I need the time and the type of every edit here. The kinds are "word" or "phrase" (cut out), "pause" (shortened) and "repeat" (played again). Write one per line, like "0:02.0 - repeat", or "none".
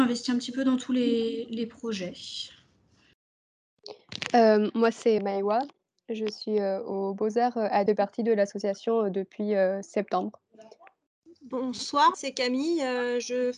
0:05.2 - word
0:07.9 - phrase
0:12.1 - word